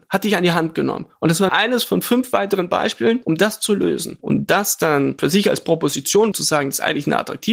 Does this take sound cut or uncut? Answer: cut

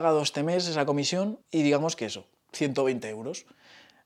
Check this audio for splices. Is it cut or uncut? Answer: cut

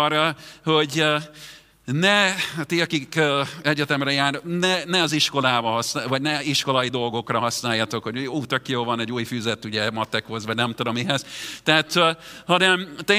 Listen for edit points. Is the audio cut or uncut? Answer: uncut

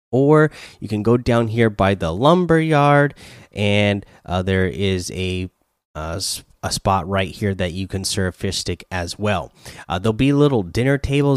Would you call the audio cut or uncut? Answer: uncut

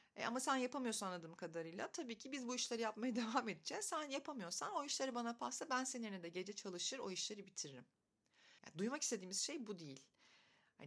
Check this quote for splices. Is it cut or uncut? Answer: cut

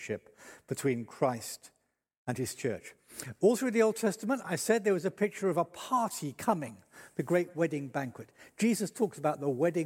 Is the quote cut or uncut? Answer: uncut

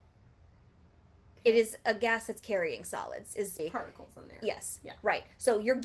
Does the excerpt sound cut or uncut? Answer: cut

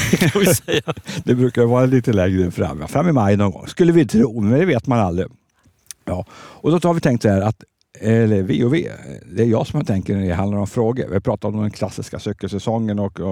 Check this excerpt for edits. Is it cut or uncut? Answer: uncut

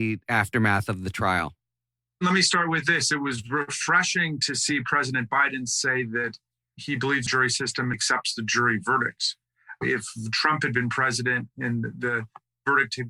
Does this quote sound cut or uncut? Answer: cut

